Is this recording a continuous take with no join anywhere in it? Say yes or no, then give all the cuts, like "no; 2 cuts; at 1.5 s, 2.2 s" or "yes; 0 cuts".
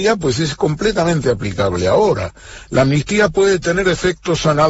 yes; 0 cuts